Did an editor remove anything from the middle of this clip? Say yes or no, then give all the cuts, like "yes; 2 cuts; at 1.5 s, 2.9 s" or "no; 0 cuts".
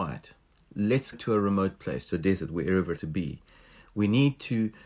yes; 3 cuts; at 1.1 s, 2.1 s, 3.0 s